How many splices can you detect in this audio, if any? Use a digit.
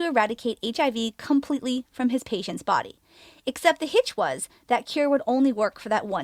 0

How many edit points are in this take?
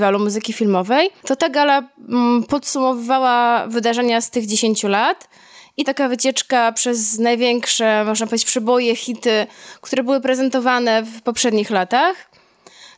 1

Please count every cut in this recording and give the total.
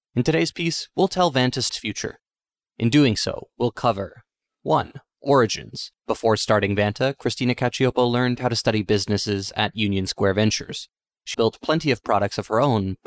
3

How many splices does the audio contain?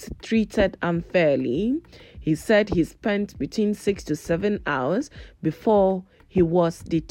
0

